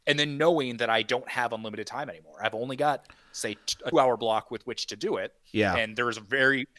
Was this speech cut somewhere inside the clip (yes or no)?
yes